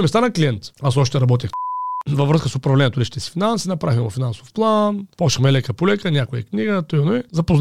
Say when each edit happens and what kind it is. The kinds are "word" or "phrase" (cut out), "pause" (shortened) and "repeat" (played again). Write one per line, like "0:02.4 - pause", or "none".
0:05.1 - pause